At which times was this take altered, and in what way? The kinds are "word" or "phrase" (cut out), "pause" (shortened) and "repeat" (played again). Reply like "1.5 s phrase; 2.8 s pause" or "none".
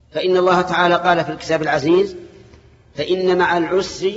none